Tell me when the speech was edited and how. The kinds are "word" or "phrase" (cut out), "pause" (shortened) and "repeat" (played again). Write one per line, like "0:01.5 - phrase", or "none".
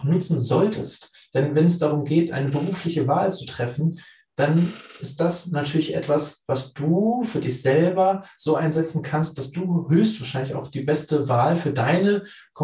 none